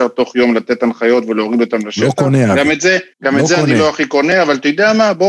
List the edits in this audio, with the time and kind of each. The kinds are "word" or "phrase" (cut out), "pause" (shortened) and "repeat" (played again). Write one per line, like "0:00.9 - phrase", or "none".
0:03.1 - pause